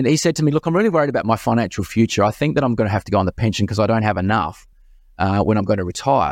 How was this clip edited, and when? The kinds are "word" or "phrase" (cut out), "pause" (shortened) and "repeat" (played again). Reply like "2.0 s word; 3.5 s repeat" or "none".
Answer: none